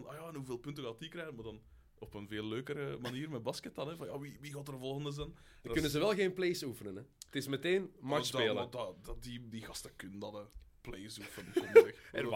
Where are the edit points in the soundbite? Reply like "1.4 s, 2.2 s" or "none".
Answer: none